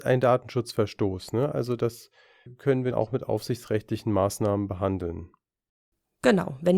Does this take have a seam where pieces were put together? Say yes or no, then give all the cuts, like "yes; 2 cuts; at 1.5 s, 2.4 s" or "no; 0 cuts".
yes; 2 cuts; at 2.5 s, 2.9 s